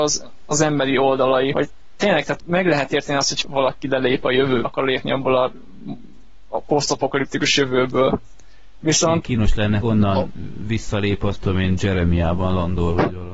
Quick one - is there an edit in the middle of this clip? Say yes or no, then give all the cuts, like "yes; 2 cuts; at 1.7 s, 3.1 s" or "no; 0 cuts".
yes; 6 cuts; at 1.5 s, 2.4 s, 3.4 s, 4.6 s, 9.8 s, 11.4 s